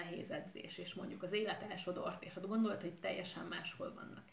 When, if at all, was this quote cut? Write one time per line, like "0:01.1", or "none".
none